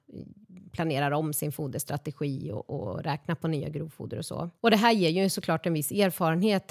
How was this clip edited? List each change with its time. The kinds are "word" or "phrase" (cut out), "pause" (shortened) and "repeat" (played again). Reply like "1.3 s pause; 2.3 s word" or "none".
4.6 s pause